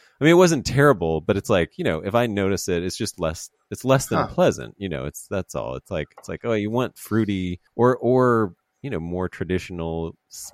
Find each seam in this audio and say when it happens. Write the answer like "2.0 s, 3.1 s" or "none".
7.7 s